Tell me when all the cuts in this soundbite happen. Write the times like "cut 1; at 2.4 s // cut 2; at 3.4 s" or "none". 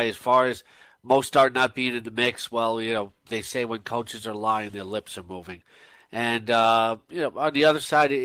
none